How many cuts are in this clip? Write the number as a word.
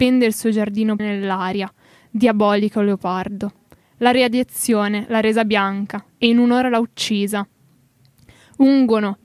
one